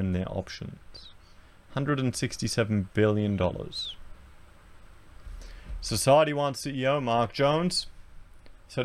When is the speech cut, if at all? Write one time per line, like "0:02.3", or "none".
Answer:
none